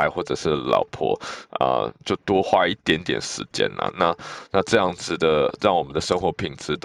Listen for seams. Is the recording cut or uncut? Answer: uncut